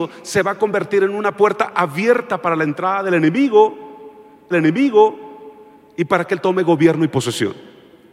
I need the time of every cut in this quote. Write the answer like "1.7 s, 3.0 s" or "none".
4.5 s

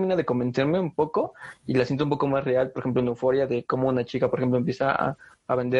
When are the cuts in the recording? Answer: none

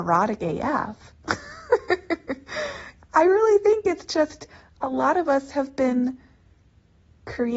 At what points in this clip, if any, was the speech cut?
none

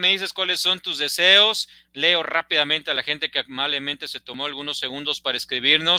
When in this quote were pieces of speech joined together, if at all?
none

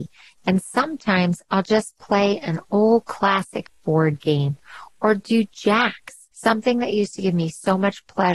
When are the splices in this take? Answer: 6.3 s

